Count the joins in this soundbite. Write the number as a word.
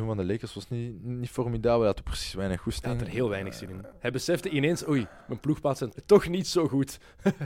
one